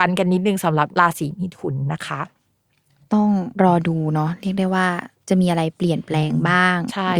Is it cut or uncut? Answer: cut